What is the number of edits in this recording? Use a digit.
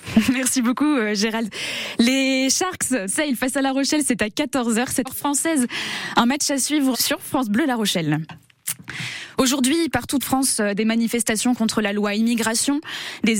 4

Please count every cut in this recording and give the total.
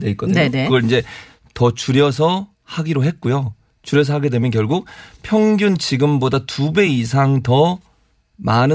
0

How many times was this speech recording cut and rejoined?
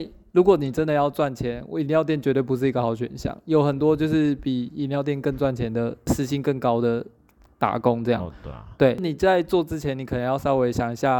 0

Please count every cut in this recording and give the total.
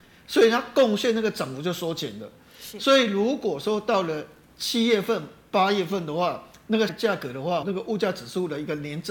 2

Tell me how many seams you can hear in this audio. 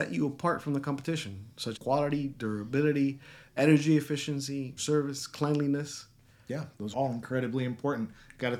3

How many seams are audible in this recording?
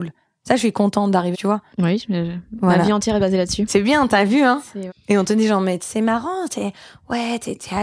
4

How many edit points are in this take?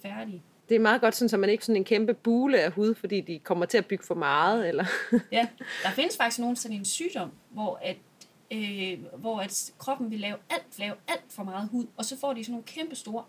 4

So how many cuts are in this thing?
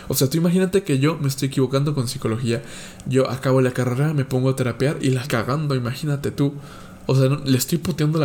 1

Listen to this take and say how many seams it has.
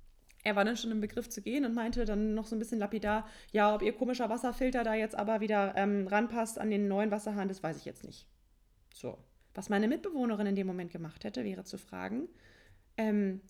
0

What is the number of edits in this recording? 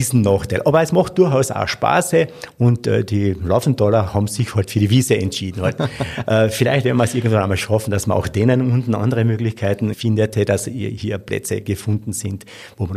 1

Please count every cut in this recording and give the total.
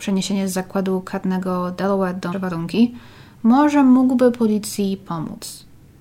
1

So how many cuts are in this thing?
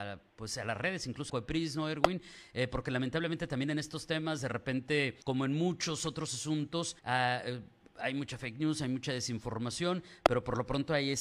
3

